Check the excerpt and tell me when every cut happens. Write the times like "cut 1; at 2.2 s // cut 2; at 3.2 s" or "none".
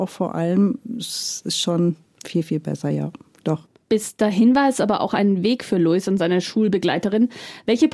cut 1; at 3.8 s